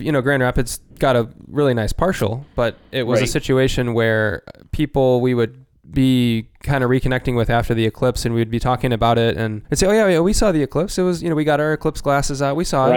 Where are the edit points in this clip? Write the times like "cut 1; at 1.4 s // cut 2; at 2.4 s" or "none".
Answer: cut 1; at 0.9 s // cut 2; at 5.7 s // cut 3; at 9.6 s